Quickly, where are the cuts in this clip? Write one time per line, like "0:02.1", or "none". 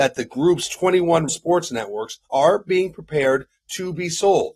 0:01.3
0:02.2